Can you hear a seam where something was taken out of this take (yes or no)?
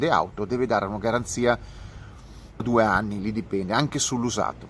yes